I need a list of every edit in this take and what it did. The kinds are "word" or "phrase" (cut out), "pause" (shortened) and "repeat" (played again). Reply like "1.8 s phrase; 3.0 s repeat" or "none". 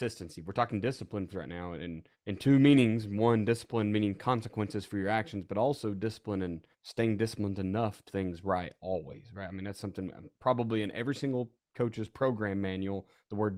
1.3 s word; 2.1 s pause; 6.7 s pause; 8.1 s phrase